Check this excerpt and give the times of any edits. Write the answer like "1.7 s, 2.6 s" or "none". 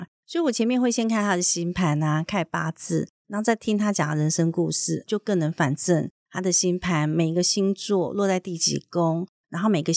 5.1 s